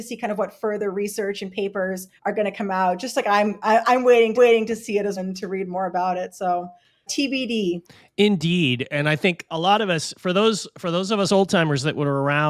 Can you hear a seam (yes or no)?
yes